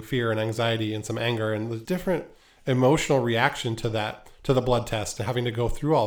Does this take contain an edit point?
yes; 1 cut; at 1.8 s

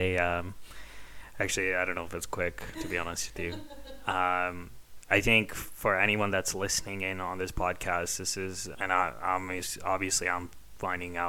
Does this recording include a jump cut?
yes; 1 cut; at 8.7 s

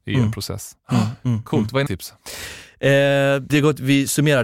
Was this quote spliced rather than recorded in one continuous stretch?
yes; 2 cuts; at 1.9 s, 3.5 s

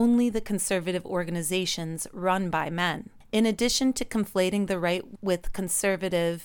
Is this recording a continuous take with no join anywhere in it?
yes; 0 cuts

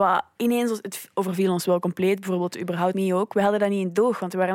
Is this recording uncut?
no; 1 cut; at 2.9 s

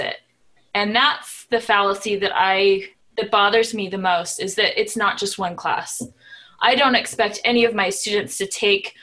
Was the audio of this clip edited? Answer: yes; 1 cut; at 2.9 s

